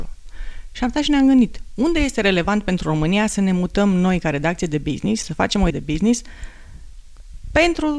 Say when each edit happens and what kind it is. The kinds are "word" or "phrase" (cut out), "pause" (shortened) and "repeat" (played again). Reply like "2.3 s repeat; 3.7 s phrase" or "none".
5.7 s word